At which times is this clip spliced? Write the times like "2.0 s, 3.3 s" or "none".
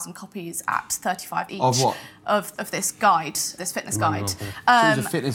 1.5 s, 2.5 s, 3.6 s